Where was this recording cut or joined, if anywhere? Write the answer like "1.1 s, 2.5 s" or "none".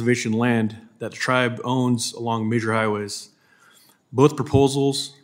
none